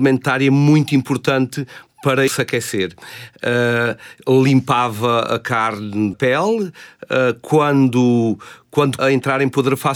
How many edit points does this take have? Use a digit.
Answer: 3